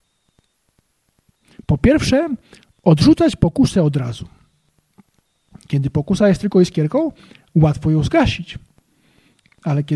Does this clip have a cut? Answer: no; 0 cuts

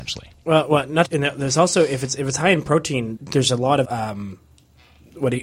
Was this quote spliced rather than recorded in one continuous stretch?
yes; 3 cuts; at 1.1 s, 3.2 s, 3.8 s

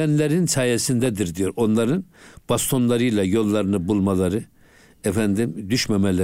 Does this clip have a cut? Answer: no; 0 cuts

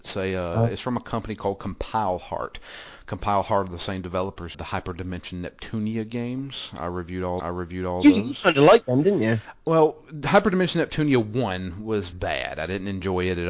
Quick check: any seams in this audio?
yes; 3 cuts; at 4.5 s, 7.4 s, 12.1 s

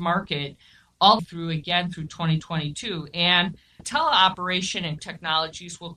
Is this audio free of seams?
no; 3 cuts; at 1.2 s, 3.8 s, 5.0 s

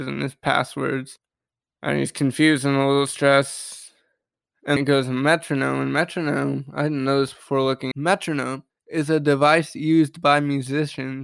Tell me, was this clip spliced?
yes; 2 cuts; at 4.8 s, 7.9 s

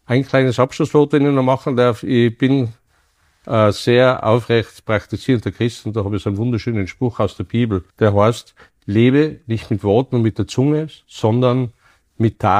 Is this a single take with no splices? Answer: no; 1 cut; at 7.9 s

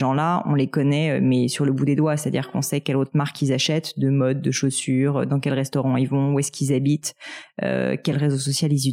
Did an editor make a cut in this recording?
no; 0 cuts

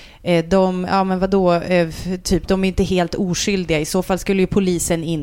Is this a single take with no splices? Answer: yes; 0 cuts

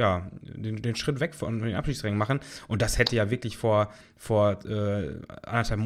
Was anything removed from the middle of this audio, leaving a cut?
no; 0 cuts

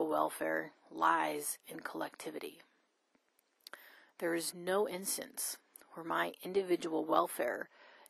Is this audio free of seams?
yes; 0 cuts

